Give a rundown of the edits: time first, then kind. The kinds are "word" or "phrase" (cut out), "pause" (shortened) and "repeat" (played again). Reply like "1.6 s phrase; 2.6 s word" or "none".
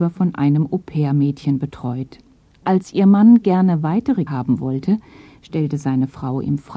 4.3 s phrase